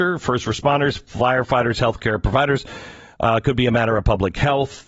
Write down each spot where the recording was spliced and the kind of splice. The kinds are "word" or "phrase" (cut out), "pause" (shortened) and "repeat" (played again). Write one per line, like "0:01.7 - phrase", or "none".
none